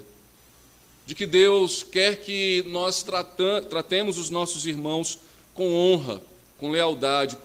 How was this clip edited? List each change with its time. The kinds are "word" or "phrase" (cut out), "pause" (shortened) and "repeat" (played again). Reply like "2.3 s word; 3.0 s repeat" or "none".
none